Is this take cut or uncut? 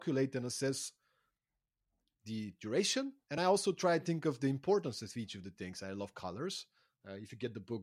uncut